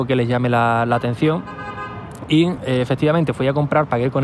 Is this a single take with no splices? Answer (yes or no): yes